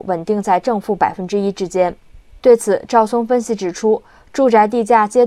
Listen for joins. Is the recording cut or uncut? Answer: uncut